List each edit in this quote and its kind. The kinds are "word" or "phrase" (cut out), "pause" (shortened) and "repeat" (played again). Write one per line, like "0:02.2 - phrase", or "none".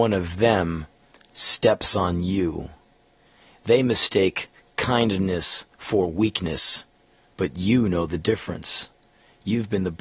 none